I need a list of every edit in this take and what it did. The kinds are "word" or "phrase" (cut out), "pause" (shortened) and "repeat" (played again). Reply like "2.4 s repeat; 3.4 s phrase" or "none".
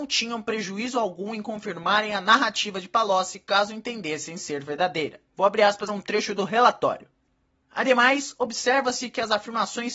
5.3 s pause; 5.9 s phrase